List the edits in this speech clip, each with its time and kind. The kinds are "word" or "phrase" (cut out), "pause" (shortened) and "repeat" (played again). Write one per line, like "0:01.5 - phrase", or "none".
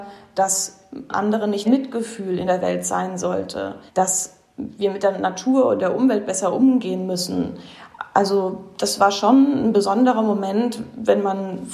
0:01.1 - word
0:01.6 - phrase
0:03.9 - pause